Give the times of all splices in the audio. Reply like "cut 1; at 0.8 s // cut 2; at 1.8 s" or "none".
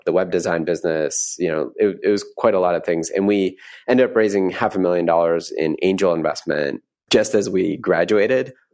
cut 1; at 6.9 s